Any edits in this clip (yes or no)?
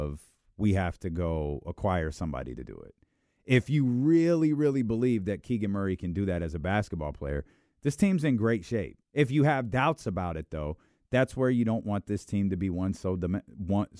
yes